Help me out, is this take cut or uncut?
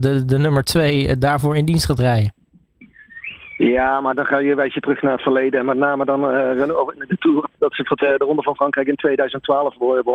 cut